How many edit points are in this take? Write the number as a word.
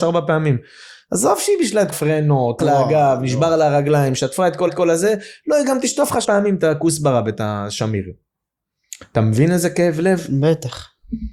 four